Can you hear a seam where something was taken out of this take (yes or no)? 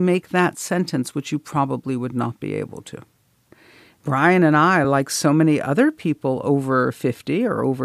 no